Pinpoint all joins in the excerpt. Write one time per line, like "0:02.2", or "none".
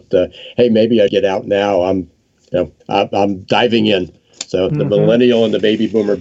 0:01.1
0:02.8
0:04.7